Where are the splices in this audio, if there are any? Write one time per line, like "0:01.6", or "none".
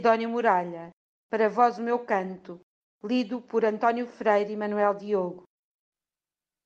none